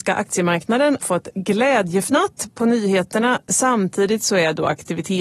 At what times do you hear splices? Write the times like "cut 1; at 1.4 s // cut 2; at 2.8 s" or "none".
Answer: cut 1; at 1.0 s

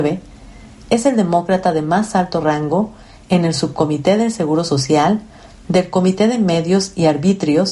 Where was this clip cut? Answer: none

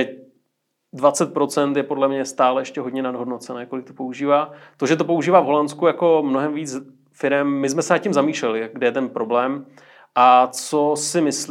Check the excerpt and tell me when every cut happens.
none

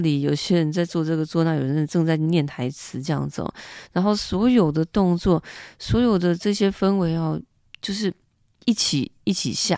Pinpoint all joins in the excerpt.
none

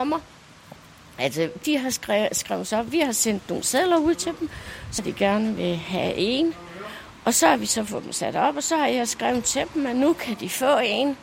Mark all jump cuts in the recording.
cut 1; at 5.0 s

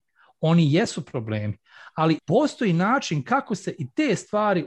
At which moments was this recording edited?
none

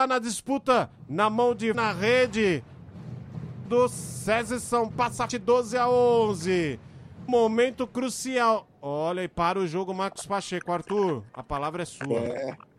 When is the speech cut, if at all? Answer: cut 1; at 1.7 s // cut 2; at 3.7 s // cut 3; at 4.9 s // cut 4; at 5.3 s // cut 5; at 7.3 s

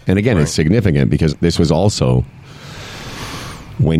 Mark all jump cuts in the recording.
cut 1; at 1.3 s

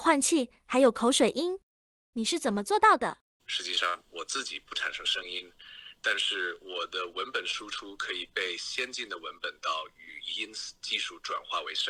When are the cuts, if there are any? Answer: none

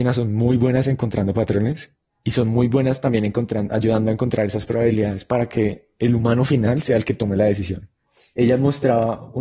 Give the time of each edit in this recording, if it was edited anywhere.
none

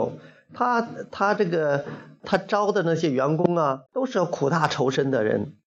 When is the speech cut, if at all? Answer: cut 1; at 2.2 s // cut 2; at 3.9 s

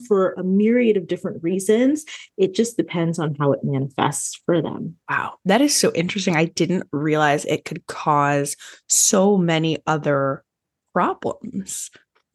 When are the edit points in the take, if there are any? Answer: cut 1; at 5.0 s

